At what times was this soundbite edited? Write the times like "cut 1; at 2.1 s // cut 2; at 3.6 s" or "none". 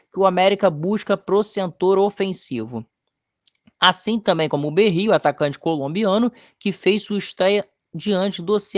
none